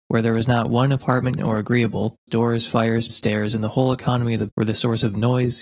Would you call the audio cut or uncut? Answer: cut